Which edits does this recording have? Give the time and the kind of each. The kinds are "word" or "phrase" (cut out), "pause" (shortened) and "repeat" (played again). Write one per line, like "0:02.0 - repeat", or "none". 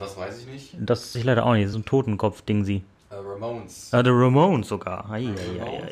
0:01.1 - word
0:01.7 - word
0:02.9 - pause